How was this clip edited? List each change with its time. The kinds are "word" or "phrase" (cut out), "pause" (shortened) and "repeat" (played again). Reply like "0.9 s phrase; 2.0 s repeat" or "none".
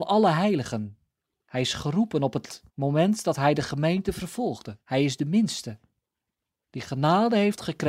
1.2 s pause; 2.7 s pause; 4.8 s pause